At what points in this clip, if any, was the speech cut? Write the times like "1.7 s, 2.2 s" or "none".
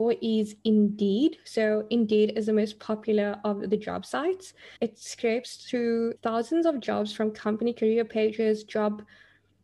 4.8 s, 6.2 s